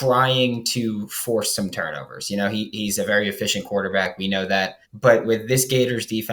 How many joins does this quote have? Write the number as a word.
one